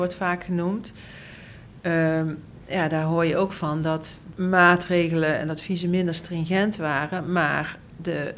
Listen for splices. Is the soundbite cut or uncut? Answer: uncut